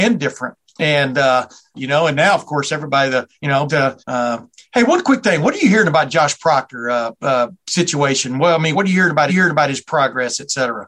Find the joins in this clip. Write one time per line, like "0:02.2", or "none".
0:01.7
0:03.3
0:03.7
0:04.0
0:08.7
0:09.3